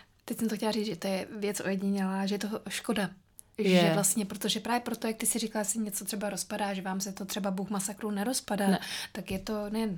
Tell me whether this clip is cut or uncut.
uncut